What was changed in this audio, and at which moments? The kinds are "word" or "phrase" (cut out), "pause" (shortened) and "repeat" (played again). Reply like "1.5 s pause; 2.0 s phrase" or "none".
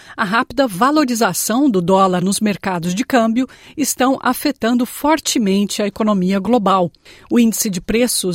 2.2 s word